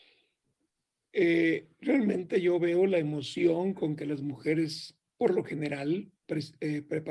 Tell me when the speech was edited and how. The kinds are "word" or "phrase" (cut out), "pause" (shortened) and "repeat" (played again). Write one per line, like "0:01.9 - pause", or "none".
0:05.1 - pause
0:06.2 - pause